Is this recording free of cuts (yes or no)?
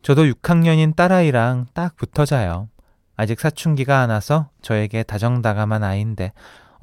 yes